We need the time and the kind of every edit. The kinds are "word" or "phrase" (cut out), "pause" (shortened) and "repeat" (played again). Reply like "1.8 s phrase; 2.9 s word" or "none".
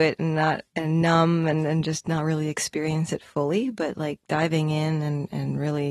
none